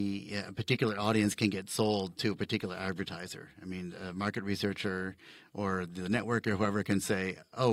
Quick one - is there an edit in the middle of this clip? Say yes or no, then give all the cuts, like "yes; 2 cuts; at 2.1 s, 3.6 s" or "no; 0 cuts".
no; 0 cuts